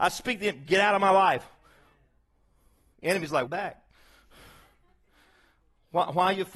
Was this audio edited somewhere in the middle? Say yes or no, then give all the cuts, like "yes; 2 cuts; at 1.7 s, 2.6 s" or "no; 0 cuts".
yes; 1 cut; at 3.5 s